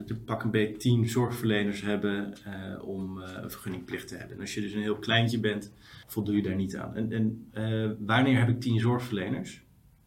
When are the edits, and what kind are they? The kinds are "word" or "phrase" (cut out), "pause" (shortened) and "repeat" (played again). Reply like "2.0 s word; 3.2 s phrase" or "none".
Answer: 6.0 s pause

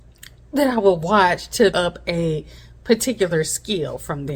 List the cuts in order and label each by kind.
1.7 s word

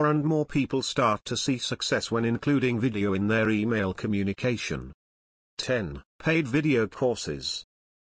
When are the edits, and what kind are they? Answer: 6.1 s pause

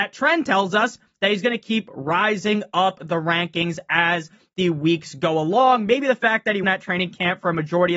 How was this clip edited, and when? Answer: 6.6 s word

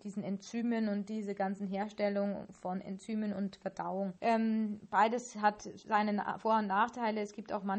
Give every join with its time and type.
4.2 s pause

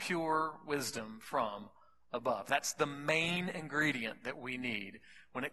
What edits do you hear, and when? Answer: none

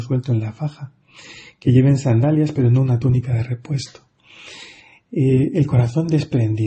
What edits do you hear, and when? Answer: none

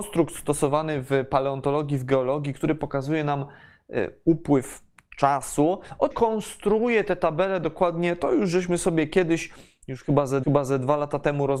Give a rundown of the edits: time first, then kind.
6.1 s phrase; 10.4 s repeat

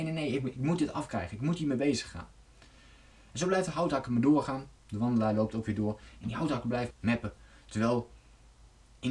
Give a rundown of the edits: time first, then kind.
6.9 s word

